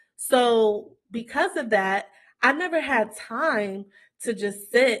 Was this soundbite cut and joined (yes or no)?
no